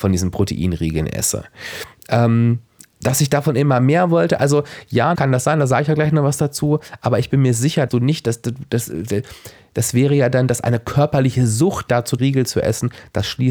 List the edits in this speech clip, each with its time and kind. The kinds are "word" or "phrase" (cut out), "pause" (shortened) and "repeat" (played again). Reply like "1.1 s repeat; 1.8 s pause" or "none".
2.8 s pause; 5.1 s word; 7.9 s word; 11.9 s word; 12.2 s phrase